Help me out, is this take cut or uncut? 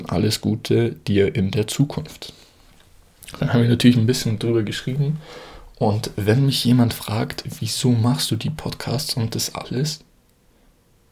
uncut